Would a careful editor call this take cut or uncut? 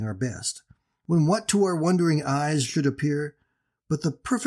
uncut